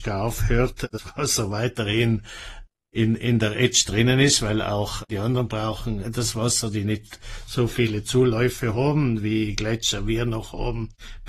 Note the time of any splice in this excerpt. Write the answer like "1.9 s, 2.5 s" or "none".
none

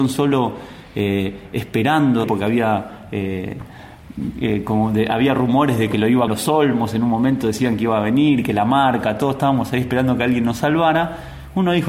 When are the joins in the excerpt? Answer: 2.2 s, 6.3 s

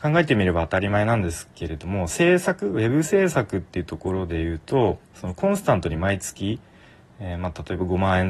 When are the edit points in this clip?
5.0 s

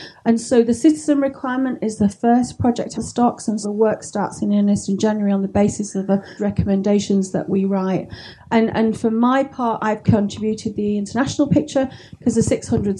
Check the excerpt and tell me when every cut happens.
2.9 s, 3.6 s, 6.4 s, 10.0 s

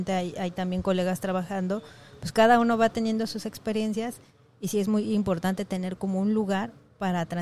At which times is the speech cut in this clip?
none

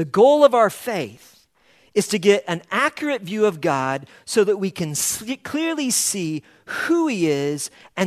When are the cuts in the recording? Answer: none

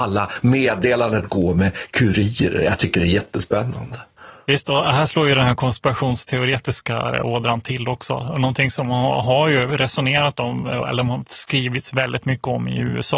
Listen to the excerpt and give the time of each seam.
none

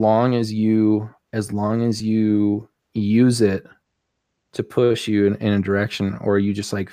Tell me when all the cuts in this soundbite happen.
none

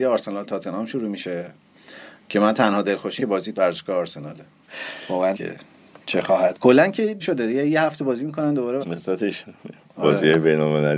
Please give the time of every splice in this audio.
3.2 s, 3.5 s, 5.3 s, 6.5 s, 7.2 s, 8.8 s

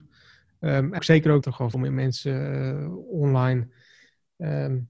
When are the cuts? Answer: 1.0 s, 1.4 s, 1.7 s

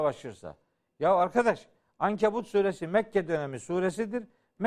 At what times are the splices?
none

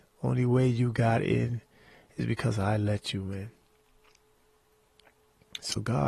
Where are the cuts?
none

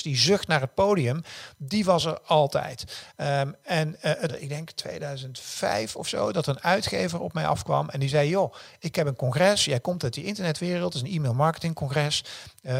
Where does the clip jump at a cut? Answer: 4.3 s

